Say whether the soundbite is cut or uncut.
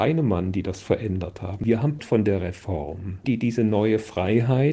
cut